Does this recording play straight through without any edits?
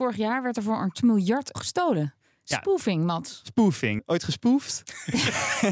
no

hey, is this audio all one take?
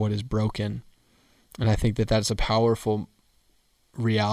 yes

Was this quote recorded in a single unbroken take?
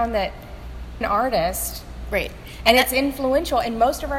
no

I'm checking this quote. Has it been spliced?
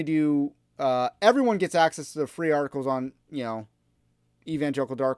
no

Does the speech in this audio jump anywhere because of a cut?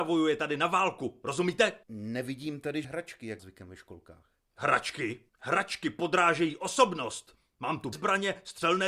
yes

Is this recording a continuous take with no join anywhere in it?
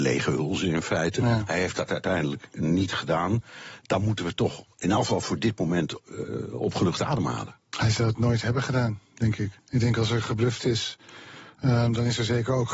no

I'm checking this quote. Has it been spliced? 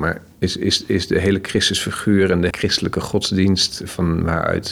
yes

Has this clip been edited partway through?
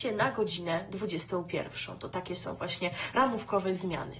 no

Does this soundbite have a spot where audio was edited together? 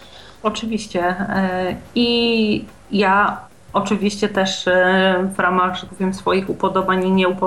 yes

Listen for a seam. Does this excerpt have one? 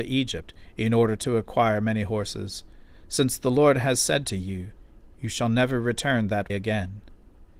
yes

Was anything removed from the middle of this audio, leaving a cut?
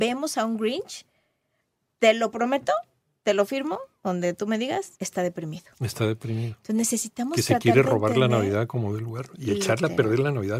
yes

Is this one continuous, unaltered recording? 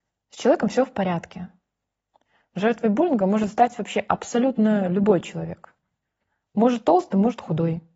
yes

